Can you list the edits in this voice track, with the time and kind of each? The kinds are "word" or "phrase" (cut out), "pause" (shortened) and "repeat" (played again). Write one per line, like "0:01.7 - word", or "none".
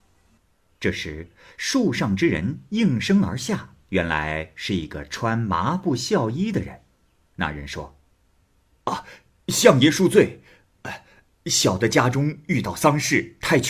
0:03.8 - pause